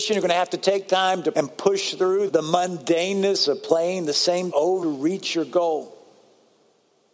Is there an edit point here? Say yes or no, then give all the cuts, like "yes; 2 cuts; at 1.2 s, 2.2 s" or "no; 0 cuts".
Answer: yes; 4 cuts; at 1.3 s, 2.3 s, 4.5 s, 4.8 s